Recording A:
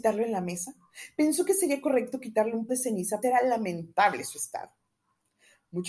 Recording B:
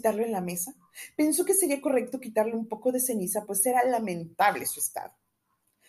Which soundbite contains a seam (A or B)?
A